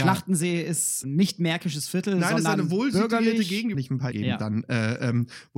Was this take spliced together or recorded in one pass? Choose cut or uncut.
cut